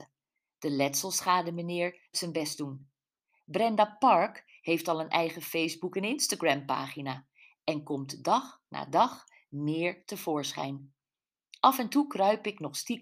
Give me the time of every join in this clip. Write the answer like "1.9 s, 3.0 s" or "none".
2.1 s